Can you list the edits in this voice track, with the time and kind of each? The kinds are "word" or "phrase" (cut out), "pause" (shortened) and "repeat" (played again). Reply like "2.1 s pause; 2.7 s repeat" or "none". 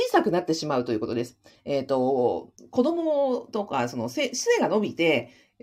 none